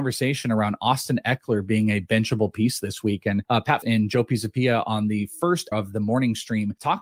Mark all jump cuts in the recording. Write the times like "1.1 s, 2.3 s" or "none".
3.8 s, 5.7 s